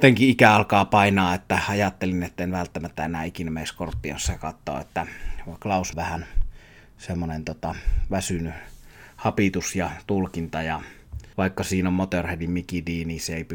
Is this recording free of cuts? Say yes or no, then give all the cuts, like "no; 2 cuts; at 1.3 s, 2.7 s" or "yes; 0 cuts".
no; 2 cuts; at 5.9 s, 11.3 s